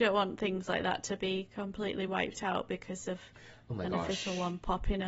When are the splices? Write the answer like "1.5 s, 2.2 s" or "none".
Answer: none